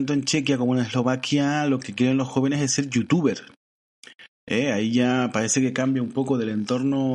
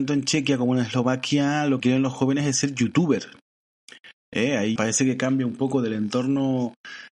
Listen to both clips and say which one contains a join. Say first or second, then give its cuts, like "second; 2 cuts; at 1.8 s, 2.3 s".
second; 2 cuts; at 1.8 s, 4.8 s